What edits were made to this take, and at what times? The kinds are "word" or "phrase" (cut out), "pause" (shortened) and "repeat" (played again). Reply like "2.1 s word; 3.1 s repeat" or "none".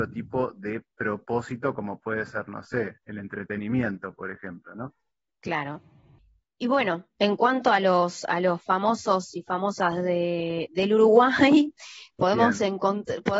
none

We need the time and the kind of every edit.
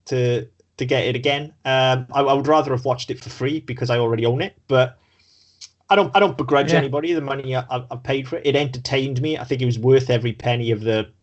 6.1 s repeat

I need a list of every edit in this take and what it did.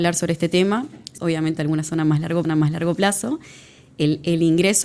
1.2 s phrase; 2.4 s repeat

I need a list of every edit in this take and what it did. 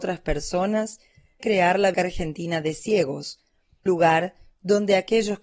1.4 s word; 1.9 s word; 3.9 s word

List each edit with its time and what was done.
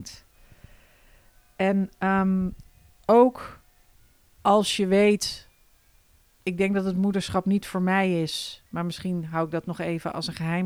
3.9 s pause; 5.9 s pause

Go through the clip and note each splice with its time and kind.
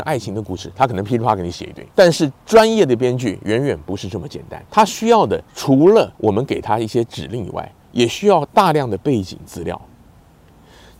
1.9 s pause; 4.7 s pause; 5.5 s pause; 6.1 s pause

